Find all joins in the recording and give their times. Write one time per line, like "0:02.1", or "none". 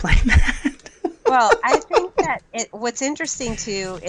none